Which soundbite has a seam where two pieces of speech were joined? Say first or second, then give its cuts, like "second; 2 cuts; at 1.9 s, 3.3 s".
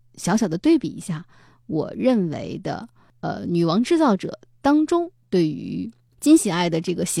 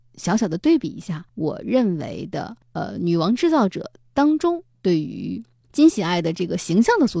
second; 2 cuts; at 1.3 s, 2.6 s